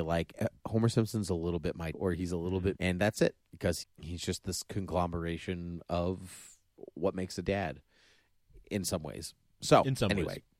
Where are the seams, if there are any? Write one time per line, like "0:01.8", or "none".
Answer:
0:01.9
0:02.8
0:03.8
0:07.4